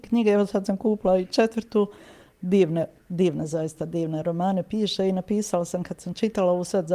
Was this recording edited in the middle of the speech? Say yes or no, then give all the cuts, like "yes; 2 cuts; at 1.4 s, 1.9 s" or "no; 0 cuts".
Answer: no; 0 cuts